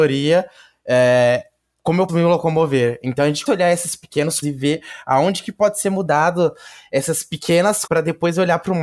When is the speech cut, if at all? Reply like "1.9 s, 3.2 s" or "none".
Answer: 2.1 s, 3.5 s, 4.4 s, 7.9 s

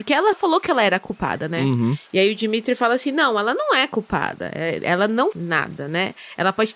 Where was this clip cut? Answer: 5.3 s

